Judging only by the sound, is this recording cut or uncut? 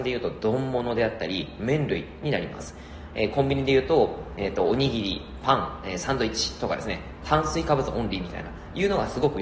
uncut